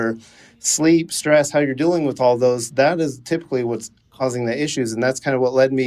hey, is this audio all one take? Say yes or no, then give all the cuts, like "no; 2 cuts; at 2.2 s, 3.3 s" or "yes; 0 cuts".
yes; 0 cuts